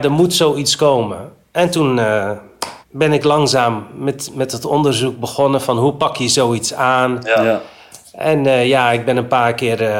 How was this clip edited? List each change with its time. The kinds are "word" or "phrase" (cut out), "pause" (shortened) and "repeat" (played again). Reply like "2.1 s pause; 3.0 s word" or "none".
2.8 s pause